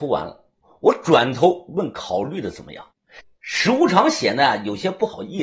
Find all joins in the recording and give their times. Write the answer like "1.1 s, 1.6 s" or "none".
2.9 s